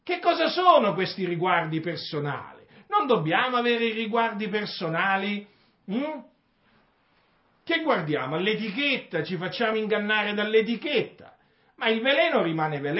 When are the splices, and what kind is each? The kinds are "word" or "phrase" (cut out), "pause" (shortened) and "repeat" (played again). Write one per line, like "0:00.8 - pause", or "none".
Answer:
none

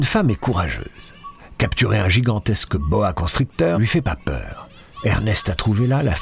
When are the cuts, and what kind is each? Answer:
0:03.7 - word

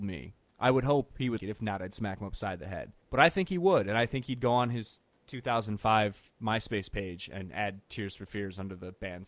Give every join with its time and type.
0:01.4 - word
0:03.0 - pause

